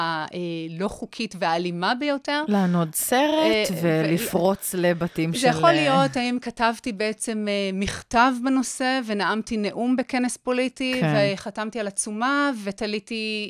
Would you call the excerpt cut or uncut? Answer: uncut